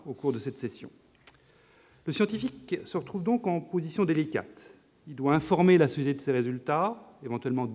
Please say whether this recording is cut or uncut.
uncut